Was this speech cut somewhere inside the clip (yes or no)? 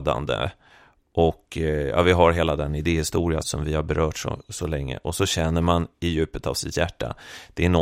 yes